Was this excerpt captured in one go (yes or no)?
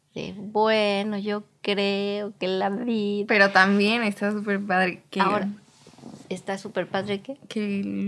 no